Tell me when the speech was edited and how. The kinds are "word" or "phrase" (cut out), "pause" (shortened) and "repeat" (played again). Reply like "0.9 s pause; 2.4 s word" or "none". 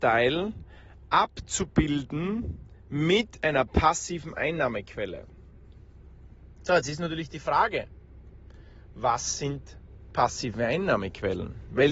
none